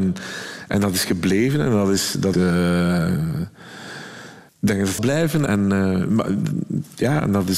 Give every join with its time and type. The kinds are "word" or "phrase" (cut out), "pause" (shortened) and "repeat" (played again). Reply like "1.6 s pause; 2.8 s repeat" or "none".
2.3 s word; 4.5 s pause; 5.0 s word; 5.5 s word

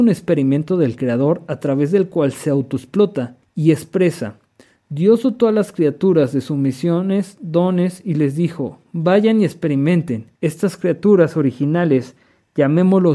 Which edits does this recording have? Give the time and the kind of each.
3.4 s pause; 10.4 s pause

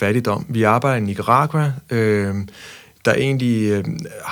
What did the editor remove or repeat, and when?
none

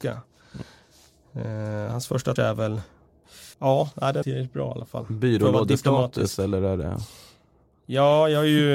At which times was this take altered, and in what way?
2.4 s word; 3.5 s pause; 4.2 s phrase

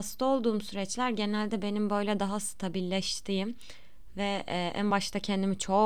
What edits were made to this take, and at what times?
none

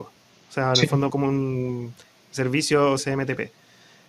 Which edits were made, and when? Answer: 1.1 s word; 3.0 s word

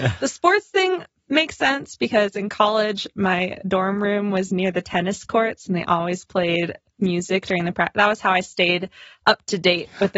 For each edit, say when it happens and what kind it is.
none

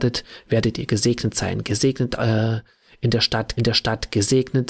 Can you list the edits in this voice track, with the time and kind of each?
3.6 s repeat

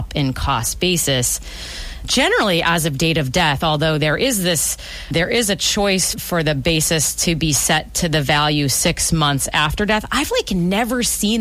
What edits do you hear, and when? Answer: none

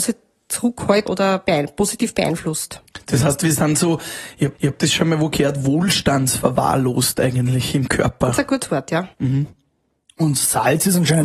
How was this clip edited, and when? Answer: 1.0 s word; 4.5 s repeat; 9.1 s pause

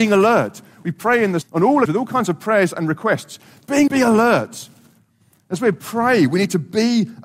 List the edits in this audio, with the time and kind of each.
1.4 s word; 1.9 s word; 3.9 s word

